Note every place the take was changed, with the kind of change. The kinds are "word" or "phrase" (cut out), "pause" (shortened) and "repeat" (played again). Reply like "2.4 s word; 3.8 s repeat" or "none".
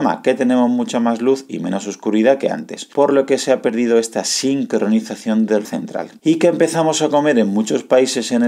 5.6 s word